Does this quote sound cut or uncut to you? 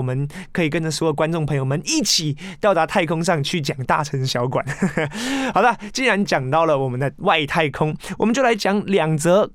uncut